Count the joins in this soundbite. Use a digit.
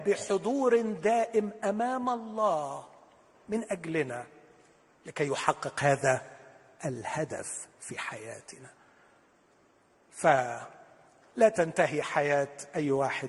0